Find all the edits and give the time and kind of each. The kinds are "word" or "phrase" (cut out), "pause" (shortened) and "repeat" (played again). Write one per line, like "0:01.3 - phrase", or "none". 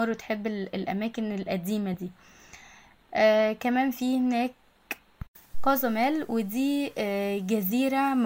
none

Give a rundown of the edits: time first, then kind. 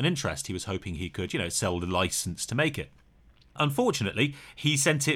none

